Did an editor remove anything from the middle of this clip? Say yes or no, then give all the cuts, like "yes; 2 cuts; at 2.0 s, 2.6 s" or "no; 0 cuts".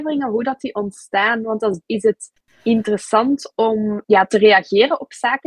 yes; 3 cuts; at 1.8 s, 2.4 s, 4.0 s